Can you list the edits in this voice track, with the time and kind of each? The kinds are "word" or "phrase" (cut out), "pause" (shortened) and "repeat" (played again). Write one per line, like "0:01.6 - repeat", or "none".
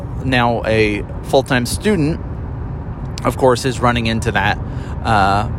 none

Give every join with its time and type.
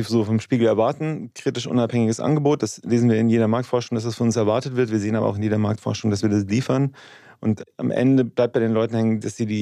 none

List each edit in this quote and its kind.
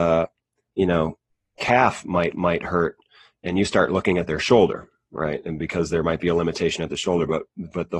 0:02.3 - repeat

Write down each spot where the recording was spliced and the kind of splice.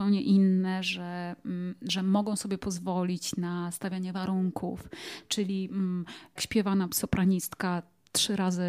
0:06.4 - word
0:06.9 - phrase

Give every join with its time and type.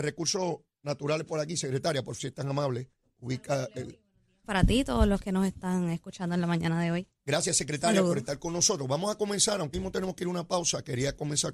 0:02.2 - word
0:03.0 - pause
0:09.7 - word

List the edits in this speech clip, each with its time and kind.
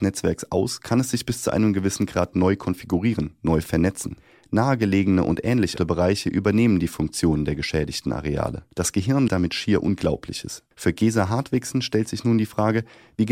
0:05.8 - word
0:08.7 - pause
0:09.3 - word
0:10.7 - pause

